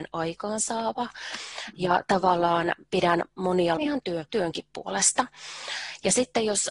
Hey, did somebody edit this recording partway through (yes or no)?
yes